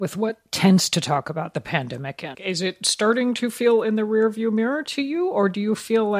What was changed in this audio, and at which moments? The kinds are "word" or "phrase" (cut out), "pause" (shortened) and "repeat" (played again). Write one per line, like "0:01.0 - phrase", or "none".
0:02.3 - word